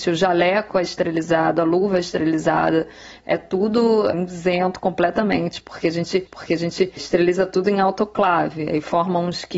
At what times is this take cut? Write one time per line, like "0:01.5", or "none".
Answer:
0:06.3